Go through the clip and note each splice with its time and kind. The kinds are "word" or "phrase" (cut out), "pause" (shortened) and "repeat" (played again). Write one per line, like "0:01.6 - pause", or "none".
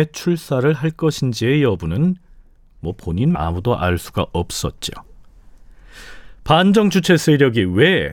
0:03.3 - word